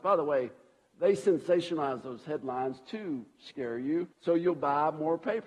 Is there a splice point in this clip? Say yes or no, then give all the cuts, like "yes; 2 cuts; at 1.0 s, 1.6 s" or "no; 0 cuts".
yes; 1 cut; at 4.1 s